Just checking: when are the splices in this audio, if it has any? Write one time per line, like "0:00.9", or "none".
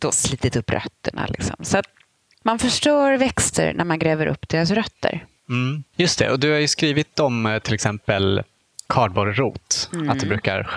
none